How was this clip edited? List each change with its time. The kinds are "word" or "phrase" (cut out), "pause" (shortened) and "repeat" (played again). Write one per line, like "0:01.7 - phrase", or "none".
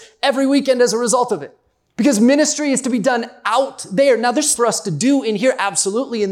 0:01.8 - pause
0:04.5 - word